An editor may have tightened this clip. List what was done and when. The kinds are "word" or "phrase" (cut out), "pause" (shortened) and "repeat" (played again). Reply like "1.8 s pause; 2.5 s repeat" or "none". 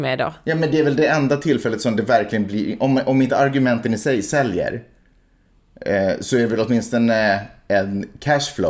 none